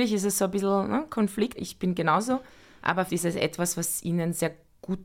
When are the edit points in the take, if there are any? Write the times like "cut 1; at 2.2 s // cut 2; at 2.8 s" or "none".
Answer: cut 1; at 1.6 s // cut 2; at 3.1 s

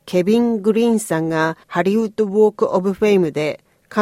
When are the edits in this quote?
cut 1; at 1.6 s

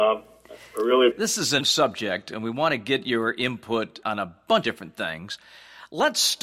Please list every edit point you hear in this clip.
cut 1; at 1.1 s // cut 2; at 1.6 s // cut 3; at 4.0 s // cut 4; at 4.6 s

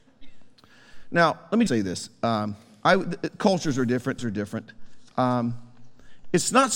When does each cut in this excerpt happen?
cut 1; at 1.7 s // cut 2; at 4.2 s

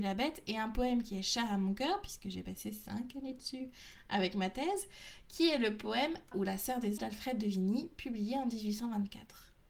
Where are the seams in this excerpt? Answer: cut 1; at 6.3 s // cut 2; at 7.0 s

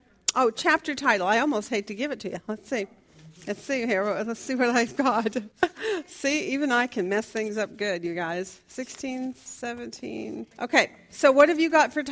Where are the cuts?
cut 1; at 5.5 s // cut 2; at 10.5 s

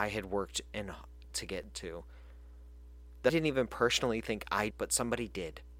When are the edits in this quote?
cut 1; at 1.3 s // cut 2; at 3.3 s // cut 3; at 4.7 s

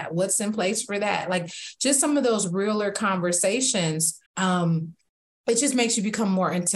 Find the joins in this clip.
cut 1; at 4.3 s

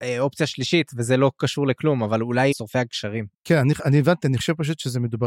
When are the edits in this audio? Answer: cut 1; at 2.5 s // cut 2; at 3.3 s

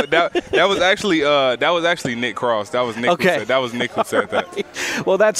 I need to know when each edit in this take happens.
none

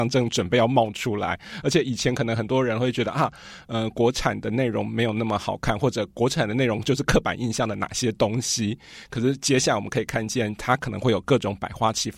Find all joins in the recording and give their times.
none

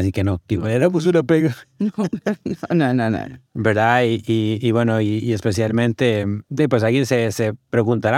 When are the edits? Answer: cut 1; at 3.5 s // cut 2; at 6.4 s

